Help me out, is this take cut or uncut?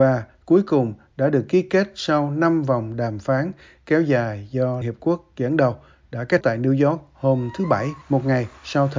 cut